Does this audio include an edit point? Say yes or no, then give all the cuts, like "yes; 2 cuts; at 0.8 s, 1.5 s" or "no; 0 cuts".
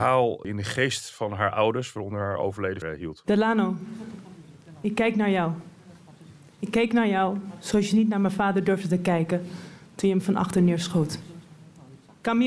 yes; 1 cut; at 2.8 s